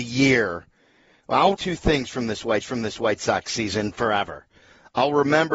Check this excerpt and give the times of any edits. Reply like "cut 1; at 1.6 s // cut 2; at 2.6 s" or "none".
cut 1; at 1.5 s // cut 2; at 2.6 s